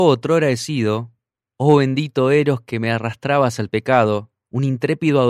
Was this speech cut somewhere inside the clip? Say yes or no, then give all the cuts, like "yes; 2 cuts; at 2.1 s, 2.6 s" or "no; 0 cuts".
no; 0 cuts